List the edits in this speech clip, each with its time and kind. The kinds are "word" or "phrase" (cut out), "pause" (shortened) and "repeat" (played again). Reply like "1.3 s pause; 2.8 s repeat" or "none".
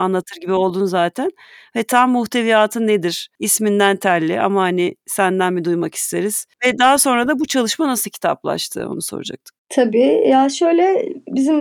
3.3 s pause; 6.5 s pause; 9.6 s pause